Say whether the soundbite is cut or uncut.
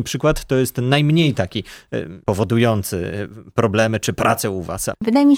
uncut